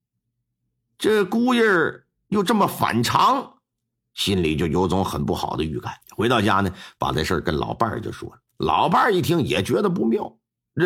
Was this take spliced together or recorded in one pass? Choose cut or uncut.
cut